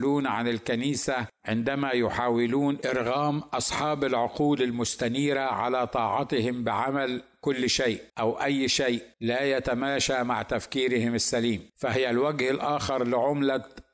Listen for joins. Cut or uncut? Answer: cut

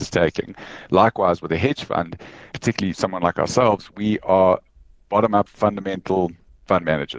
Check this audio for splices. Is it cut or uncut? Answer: cut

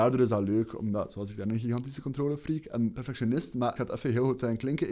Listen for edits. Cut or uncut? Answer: cut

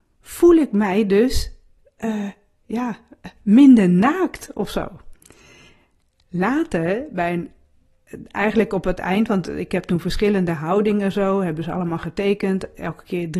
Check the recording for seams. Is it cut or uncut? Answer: uncut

